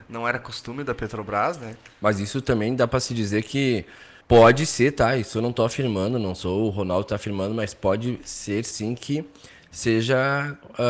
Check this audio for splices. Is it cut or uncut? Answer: cut